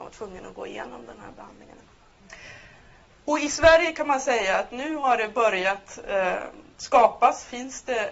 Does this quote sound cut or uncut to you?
uncut